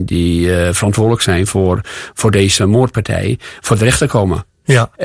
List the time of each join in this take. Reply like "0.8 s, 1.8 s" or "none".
none